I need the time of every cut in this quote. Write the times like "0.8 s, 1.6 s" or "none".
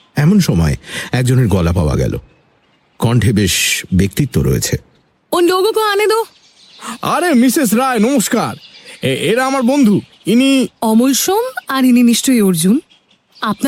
none